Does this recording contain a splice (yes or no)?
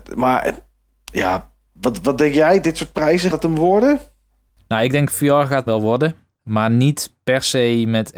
yes